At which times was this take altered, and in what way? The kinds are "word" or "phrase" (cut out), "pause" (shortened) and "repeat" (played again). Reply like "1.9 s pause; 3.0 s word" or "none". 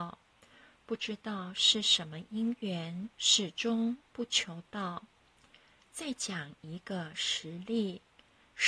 3.1 s pause; 5.3 s pause

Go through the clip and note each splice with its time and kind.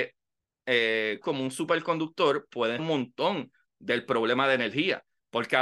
1.2 s word; 2.8 s word

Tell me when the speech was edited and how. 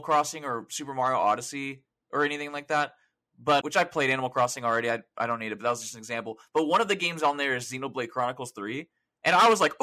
3.6 s word

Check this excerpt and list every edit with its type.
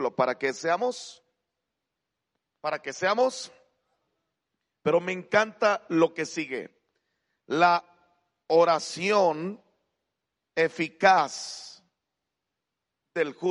none

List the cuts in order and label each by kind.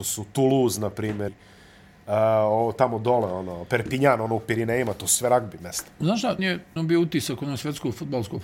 1.3 s word; 6.4 s word; 6.8 s phrase

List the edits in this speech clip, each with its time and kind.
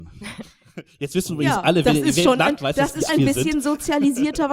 2.6 s phrase; 3.1 s word

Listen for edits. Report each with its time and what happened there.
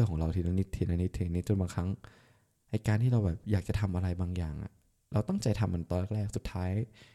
none

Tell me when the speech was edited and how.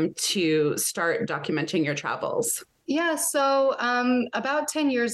2.8 s pause

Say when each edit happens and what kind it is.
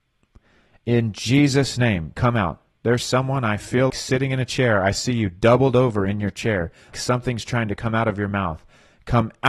3.9 s word; 6.9 s word

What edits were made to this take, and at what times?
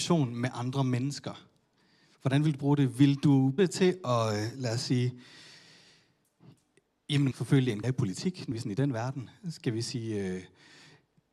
3.6 s word; 7.3 s word; 7.8 s word; 8.5 s word

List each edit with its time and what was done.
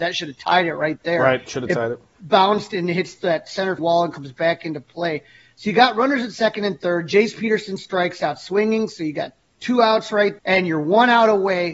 3.8 s word; 9.4 s pause; 10.4 s word

